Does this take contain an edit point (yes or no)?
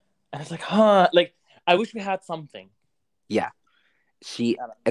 no